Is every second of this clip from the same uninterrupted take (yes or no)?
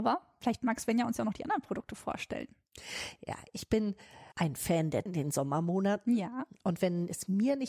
no